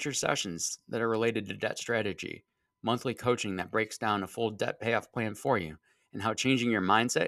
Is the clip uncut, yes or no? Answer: yes